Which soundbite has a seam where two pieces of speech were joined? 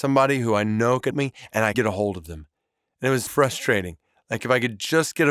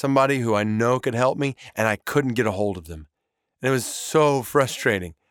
first; 3 cuts; at 1.1 s, 1.7 s, 3.3 s

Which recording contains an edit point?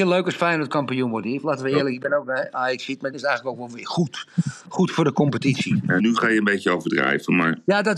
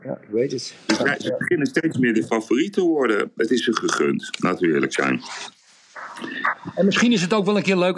first; 2 cuts; at 3.1 s, 6.0 s

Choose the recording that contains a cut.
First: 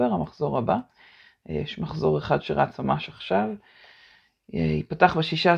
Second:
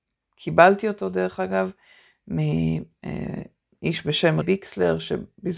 second; 1 cut; at 4.4 s

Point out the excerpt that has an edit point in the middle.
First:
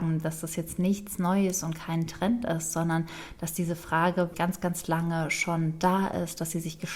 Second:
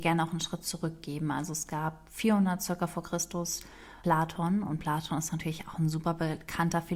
first; 1 cut; at 4.3 s

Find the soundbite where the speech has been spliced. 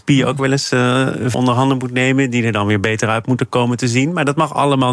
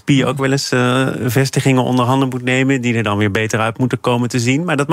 first; 1 cut; at 1.3 s

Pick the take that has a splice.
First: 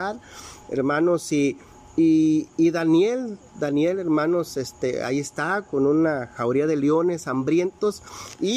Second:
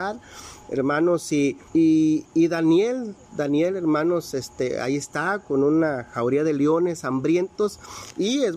second; 1 cut; at 1.7 s

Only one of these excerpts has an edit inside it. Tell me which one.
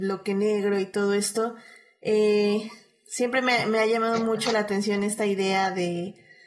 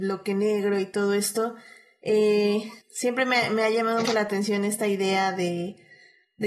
second; 2 cuts; at 2.8 s, 4.0 s

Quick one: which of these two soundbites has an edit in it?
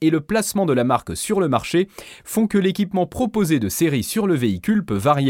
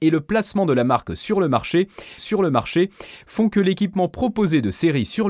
second; 1 cut; at 2.2 s

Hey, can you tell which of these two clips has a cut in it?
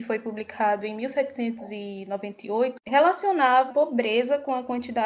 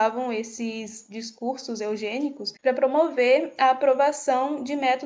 first; 1 cut; at 3.7 s

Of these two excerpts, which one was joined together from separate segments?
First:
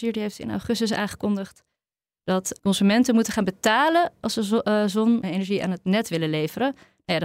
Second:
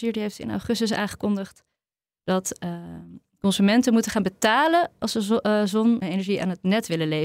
first; 1 cut; at 2.6 s

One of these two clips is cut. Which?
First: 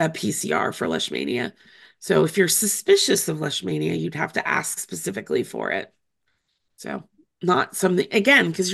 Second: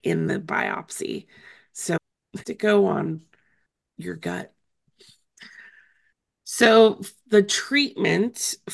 second; 2 cuts; at 2.0 s, 2.4 s

